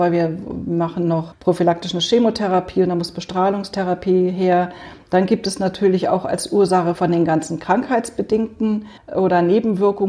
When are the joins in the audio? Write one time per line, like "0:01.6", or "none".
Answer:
0:06.9
0:09.0